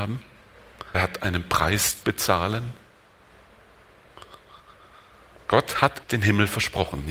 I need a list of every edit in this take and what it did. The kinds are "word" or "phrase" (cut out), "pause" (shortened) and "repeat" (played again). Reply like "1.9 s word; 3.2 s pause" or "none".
0.9 s word; 2.0 s word; 6.0 s word